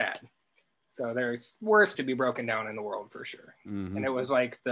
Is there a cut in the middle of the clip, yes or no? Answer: yes